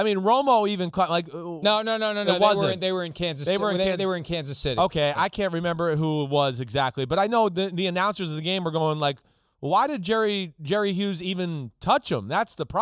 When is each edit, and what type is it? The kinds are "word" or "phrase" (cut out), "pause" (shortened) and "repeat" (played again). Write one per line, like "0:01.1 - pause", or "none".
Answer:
none